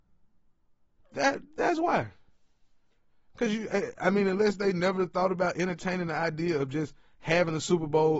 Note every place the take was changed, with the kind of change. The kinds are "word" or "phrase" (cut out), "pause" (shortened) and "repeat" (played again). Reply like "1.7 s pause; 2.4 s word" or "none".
none

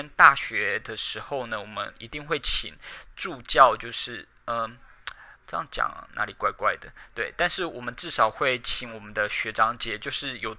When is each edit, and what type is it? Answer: 5.4 s pause

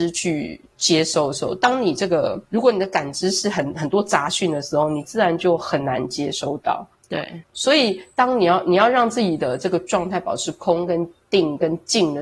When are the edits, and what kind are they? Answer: 2.4 s pause

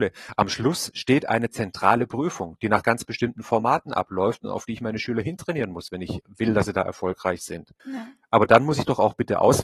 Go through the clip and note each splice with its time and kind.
7.8 s pause

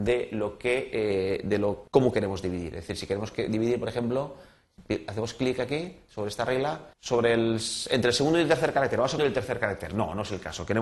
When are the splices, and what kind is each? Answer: 1.9 s pause; 6.9 s pause; 9.2 s phrase

